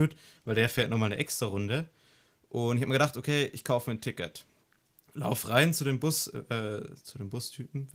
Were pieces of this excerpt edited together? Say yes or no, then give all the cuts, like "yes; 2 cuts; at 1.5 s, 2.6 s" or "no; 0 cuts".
no; 0 cuts